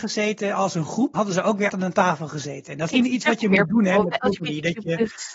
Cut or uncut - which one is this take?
cut